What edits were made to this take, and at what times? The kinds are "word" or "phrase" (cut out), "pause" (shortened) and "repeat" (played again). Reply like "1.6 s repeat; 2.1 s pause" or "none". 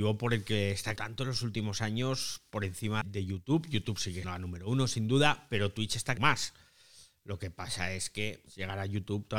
1.0 s word; 3.0 s word; 4.2 s word; 6.2 s word; 8.5 s word